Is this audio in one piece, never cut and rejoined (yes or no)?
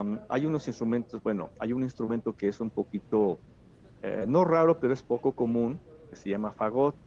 yes